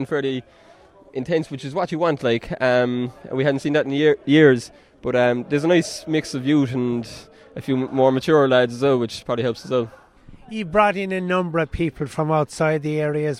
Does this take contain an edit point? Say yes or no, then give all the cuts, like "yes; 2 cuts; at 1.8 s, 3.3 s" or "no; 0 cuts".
no; 0 cuts